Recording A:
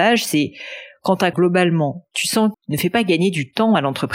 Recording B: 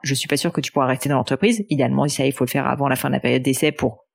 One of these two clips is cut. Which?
A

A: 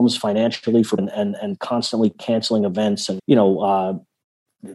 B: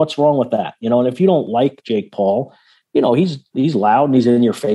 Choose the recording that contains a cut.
A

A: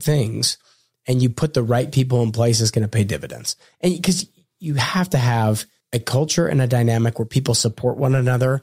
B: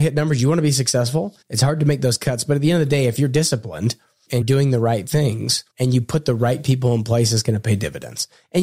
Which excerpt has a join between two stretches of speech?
B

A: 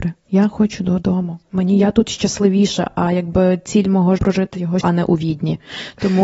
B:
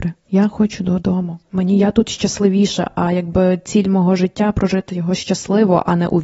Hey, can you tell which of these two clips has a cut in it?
A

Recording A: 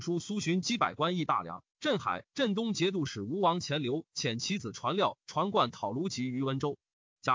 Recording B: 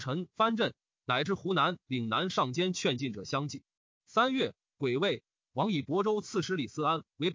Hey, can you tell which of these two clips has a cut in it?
A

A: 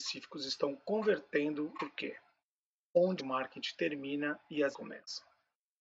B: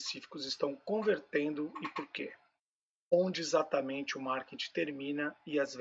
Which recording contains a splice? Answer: A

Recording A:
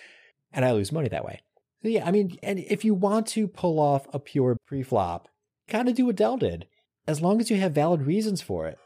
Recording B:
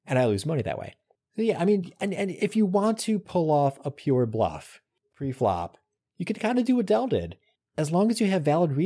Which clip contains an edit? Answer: A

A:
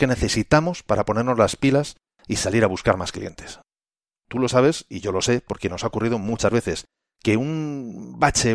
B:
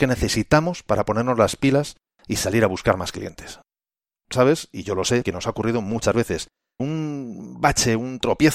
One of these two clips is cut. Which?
B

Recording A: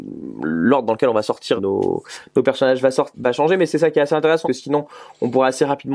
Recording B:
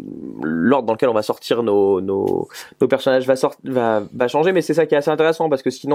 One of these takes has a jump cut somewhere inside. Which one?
A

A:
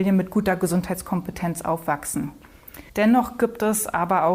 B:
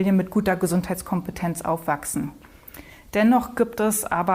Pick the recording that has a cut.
A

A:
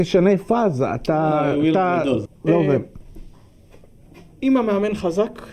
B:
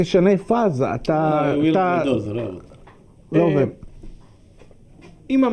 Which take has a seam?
A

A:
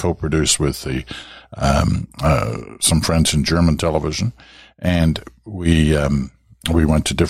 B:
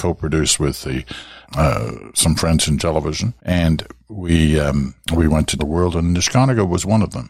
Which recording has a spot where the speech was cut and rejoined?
B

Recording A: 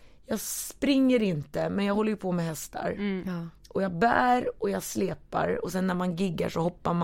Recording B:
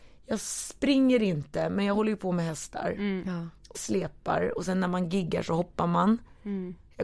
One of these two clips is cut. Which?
B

